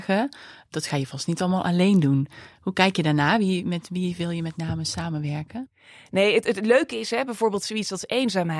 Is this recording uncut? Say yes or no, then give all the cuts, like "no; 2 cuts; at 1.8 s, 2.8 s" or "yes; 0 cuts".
yes; 0 cuts